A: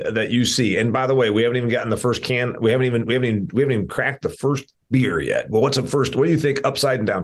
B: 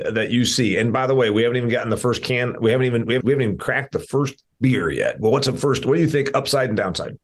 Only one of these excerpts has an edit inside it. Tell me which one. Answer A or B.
B